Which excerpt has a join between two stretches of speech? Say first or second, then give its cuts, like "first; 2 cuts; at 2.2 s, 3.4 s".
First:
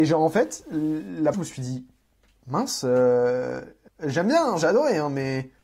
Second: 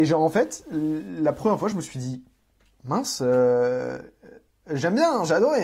first; 2 cuts; at 1.3 s, 3.9 s